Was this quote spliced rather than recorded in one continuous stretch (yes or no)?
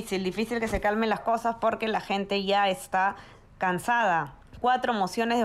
no